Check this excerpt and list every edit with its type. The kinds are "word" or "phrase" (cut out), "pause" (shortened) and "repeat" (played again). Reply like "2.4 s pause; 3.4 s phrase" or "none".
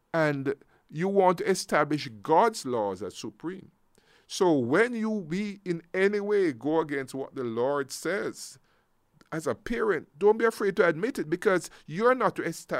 none